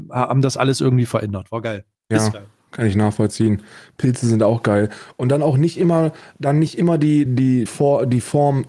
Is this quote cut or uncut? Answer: cut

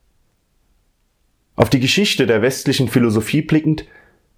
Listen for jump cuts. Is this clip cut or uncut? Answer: uncut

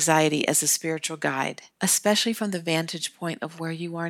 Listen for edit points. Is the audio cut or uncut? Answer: cut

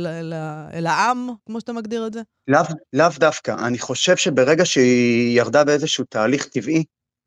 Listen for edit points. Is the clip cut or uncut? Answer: cut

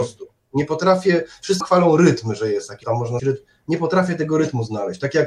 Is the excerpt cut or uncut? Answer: cut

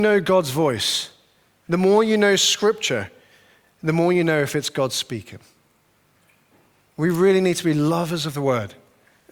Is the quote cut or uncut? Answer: uncut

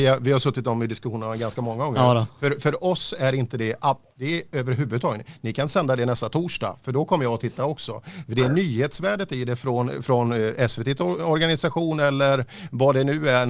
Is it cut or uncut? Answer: uncut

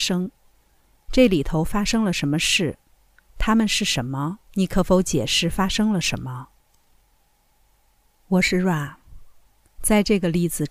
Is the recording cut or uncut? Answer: cut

